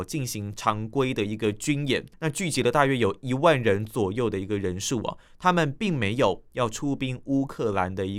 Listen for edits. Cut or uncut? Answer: cut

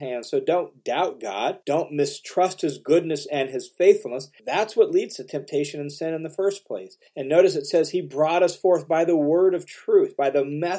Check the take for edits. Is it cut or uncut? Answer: cut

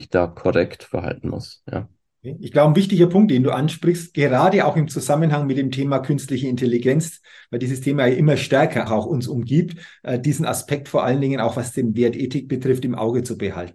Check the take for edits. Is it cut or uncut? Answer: cut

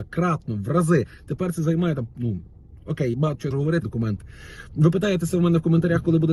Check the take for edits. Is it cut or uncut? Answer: cut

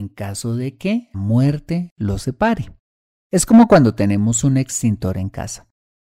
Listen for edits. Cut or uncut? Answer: cut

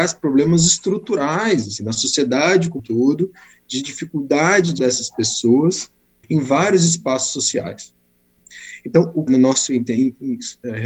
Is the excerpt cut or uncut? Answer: cut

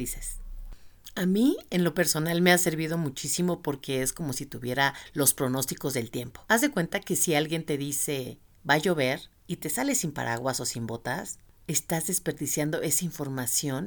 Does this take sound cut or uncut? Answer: uncut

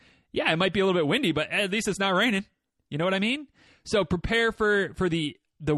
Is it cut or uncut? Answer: uncut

